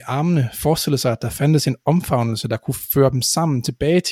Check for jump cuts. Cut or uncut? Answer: uncut